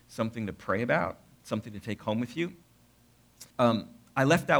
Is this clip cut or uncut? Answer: cut